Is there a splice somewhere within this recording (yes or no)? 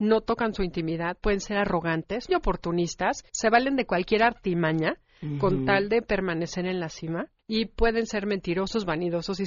yes